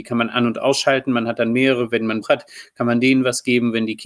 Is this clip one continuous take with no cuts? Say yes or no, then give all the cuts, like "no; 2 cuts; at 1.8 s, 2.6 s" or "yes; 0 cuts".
no; 1 cut; at 2.2 s